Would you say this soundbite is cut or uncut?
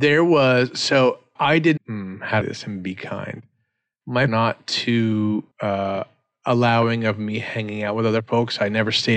cut